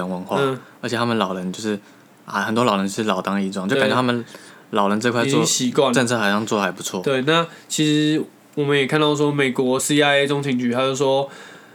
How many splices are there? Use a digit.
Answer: 0